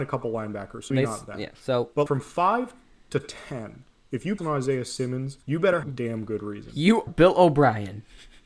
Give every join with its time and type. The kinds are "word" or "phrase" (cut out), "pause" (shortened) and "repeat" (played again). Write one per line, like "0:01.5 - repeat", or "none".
0:00.9 - word
0:02.1 - word
0:04.4 - word
0:05.4 - pause
0:05.8 - phrase
0:07.1 - word